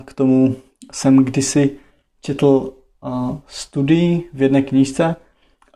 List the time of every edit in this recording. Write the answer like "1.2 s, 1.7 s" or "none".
none